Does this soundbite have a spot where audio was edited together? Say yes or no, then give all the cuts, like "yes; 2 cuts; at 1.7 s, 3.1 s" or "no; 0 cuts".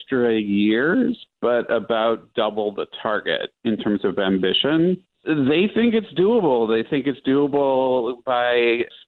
no; 0 cuts